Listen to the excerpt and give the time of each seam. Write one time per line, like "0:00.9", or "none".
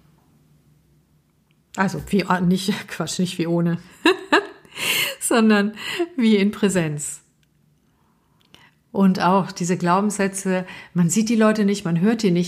none